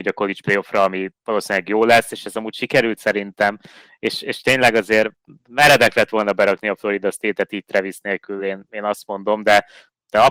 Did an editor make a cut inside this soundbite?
no; 0 cuts

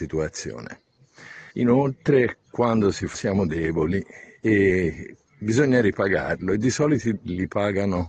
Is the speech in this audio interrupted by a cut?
yes; 4 cuts; at 1.5 s, 3.1 s, 5.3 s, 7.2 s

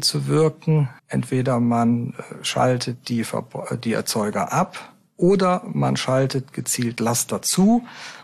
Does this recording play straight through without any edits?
no; 1 cut; at 1.0 s

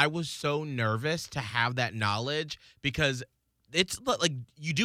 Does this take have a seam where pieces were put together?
no; 0 cuts

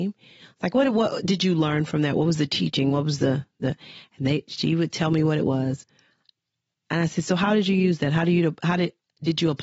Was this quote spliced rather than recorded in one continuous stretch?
no; 0 cuts

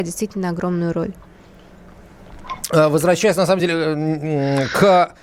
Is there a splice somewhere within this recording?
no; 0 cuts

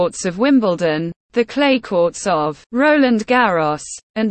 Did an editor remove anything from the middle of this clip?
yes; 1 cut; at 2.7 s

